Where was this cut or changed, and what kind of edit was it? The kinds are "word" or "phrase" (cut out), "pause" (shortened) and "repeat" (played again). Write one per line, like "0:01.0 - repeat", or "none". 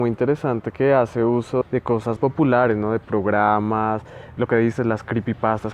0:01.6 - word
0:02.2 - word
0:04.4 - word